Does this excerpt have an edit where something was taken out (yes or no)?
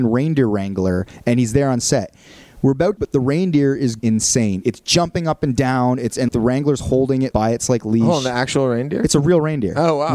yes